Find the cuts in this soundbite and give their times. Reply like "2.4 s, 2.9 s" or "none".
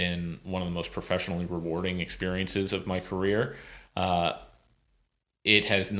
none